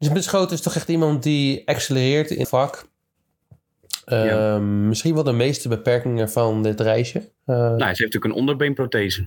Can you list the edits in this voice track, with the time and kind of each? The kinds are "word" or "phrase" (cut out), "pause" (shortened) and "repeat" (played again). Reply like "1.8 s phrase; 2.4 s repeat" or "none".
2.4 s word